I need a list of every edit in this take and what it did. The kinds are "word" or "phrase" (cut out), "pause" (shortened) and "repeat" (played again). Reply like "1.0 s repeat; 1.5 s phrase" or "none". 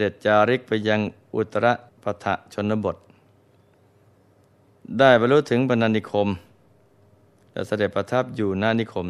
1.9 s pause